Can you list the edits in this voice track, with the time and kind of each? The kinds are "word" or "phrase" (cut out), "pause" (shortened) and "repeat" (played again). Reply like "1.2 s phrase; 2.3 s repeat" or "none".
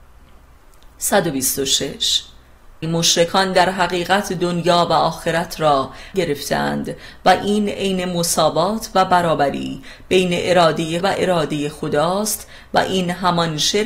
2.8 s word; 6.1 s word; 11.0 s word